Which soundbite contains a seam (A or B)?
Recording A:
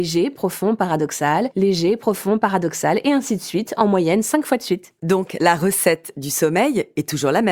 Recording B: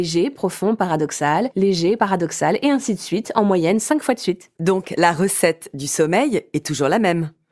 B